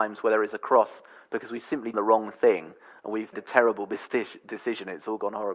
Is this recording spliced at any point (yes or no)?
yes